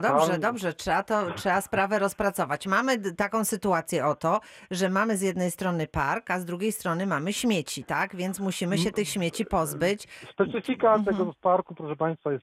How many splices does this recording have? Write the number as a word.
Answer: zero